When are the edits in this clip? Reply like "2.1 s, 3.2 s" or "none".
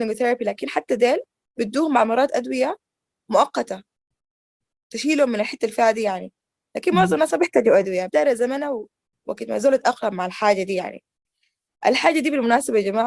8.1 s